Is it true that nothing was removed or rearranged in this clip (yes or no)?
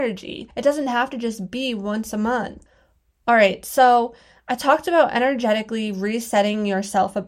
yes